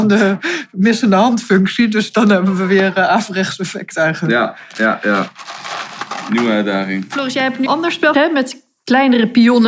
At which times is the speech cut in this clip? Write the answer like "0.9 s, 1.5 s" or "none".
7.7 s, 8.1 s